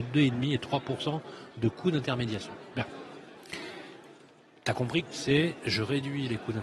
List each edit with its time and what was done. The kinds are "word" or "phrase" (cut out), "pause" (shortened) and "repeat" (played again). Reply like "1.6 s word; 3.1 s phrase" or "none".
5.1 s word